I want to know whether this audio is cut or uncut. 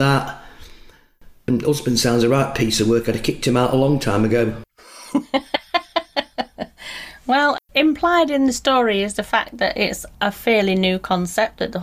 cut